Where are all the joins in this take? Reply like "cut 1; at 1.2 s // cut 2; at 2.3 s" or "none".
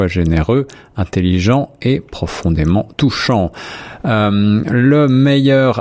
cut 1; at 2.9 s